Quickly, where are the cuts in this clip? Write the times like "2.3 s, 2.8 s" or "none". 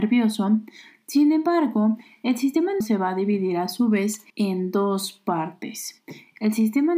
2.8 s, 4.3 s